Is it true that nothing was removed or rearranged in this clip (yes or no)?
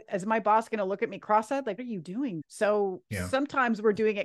no